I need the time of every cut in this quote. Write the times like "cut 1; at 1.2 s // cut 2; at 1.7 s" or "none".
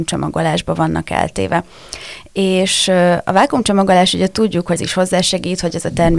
cut 1; at 4.8 s